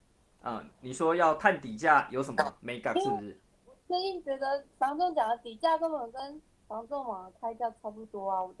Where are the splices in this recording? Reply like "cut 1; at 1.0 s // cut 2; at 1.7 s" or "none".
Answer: none